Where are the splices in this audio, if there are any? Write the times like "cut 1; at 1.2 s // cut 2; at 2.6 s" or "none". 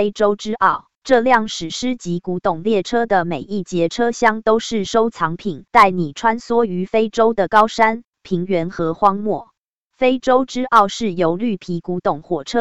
cut 1; at 0.9 s // cut 2; at 5.7 s // cut 3; at 9.6 s